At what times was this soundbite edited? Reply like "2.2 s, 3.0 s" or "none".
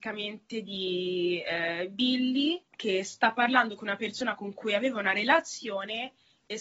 2.7 s